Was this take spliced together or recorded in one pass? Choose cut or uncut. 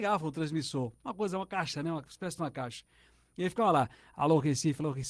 uncut